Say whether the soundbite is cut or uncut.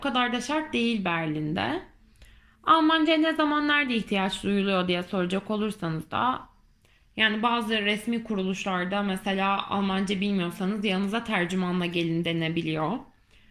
uncut